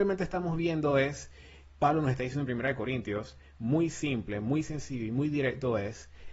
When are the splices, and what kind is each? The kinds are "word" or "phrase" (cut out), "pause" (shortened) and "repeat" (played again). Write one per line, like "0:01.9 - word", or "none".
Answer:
none